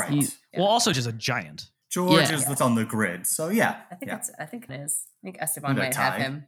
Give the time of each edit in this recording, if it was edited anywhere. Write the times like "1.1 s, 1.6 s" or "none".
0.9 s, 2.6 s, 4.7 s